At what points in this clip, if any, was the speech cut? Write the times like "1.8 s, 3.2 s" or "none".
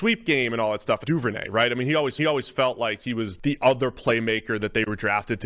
1.0 s, 2.2 s, 3.4 s